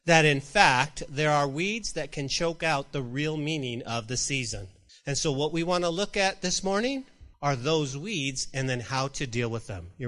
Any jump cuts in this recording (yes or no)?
yes